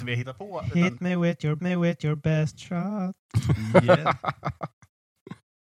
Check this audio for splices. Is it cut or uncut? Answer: cut